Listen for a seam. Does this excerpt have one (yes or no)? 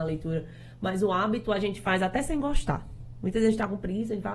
no